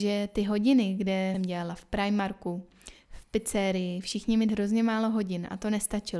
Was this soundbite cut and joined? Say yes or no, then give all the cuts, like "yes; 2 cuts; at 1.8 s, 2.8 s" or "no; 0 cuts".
yes; 2 cuts; at 1.3 s, 4.5 s